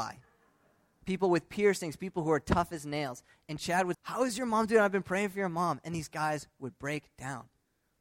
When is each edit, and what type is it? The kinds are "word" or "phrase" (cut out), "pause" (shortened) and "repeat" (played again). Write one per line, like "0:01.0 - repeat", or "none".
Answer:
0:03.9 - word